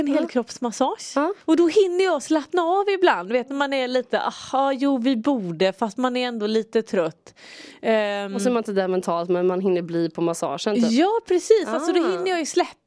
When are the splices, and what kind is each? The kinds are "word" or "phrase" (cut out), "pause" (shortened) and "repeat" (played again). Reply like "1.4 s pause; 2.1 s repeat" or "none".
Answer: 1.4 s pause